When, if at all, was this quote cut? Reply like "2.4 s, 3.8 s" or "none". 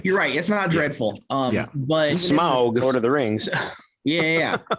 2.1 s, 2.8 s